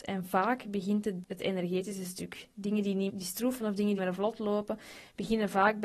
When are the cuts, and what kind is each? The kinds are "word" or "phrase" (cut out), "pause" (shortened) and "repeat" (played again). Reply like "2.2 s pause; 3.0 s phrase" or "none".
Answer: 1.2 s word; 3.1 s word; 3.6 s word; 4.0 s word